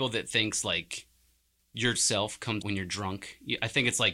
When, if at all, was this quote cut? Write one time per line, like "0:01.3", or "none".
0:01.9
0:02.6